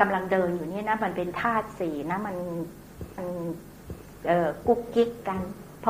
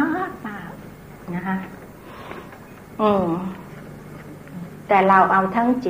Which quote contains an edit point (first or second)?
first